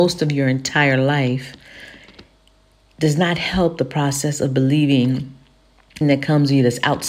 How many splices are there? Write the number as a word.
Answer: one